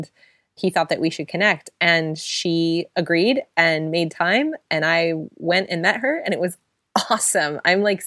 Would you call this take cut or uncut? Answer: uncut